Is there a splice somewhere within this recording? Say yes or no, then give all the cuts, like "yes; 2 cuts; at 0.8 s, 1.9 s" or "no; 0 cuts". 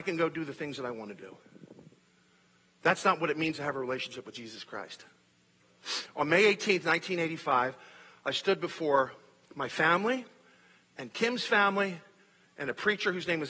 no; 0 cuts